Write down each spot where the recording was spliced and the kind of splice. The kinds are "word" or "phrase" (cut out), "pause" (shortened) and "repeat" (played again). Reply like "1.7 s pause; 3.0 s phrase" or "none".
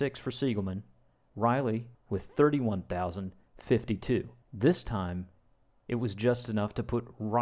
1.9 s word; 4.4 s pause